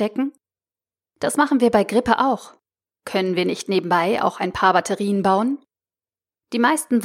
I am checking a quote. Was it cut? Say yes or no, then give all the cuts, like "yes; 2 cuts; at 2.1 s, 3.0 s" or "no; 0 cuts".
no; 0 cuts